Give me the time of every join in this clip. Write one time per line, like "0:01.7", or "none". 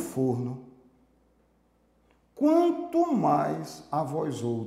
none